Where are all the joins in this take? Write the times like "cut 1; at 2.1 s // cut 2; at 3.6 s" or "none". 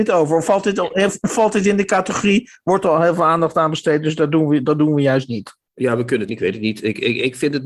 cut 1; at 6.3 s